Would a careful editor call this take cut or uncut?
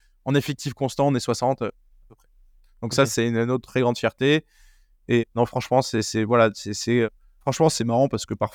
uncut